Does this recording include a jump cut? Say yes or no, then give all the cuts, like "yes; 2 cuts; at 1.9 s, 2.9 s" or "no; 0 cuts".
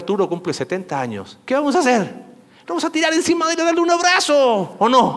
no; 0 cuts